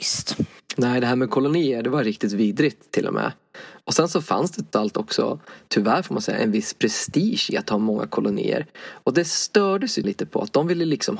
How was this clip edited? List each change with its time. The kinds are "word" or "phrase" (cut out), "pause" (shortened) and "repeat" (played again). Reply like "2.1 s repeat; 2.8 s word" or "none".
4.7 s word; 10.0 s word